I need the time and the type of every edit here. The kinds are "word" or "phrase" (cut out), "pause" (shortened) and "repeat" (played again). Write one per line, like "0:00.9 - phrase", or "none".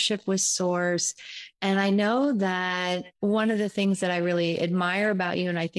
0:03.2 - pause

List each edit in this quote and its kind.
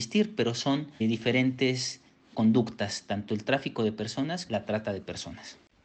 0:01.0 - word
0:02.3 - word
0:04.5 - word

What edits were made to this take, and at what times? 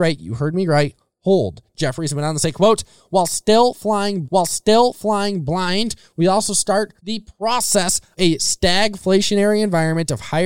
0:04.2 - repeat
0:07.0 - pause
0:08.2 - phrase

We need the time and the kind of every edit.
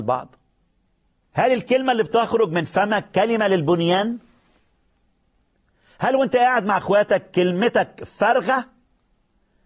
none

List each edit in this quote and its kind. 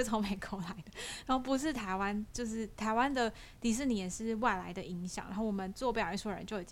none

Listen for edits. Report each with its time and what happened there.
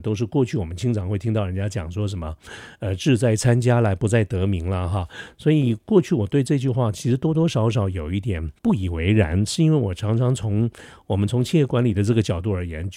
0:08.6 - pause

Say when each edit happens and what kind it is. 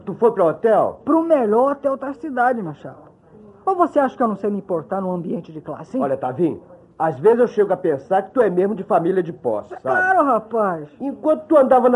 none

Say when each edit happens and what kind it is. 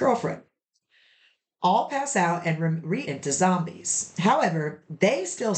0:03.0 - word

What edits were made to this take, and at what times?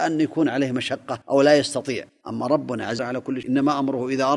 0:01.2 - pause
0:02.1 - pause
0:03.0 - phrase
0:03.4 - word

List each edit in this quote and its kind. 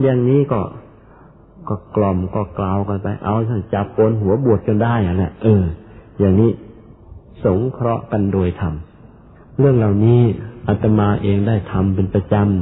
none

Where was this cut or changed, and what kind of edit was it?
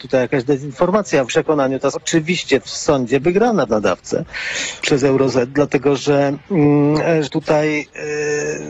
0:01.3 - word
0:01.9 - word
0:03.2 - word
0:03.7 - word
0:04.8 - word
0:07.3 - word

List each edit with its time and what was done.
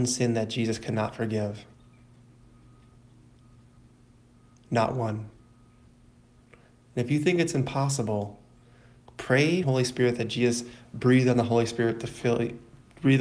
0:09.6 - phrase

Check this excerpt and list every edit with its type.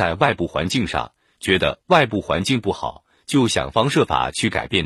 none

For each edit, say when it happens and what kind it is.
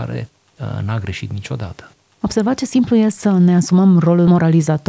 none

